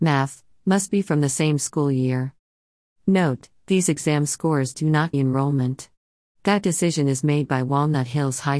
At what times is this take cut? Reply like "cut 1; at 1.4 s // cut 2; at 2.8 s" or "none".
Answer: cut 1; at 5.1 s